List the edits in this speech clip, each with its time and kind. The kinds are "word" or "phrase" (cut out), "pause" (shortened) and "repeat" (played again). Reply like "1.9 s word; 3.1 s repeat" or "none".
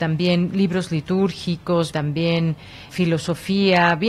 1.9 s word; 2.9 s word